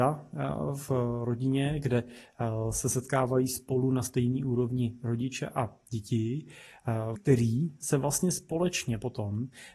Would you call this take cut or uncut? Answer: cut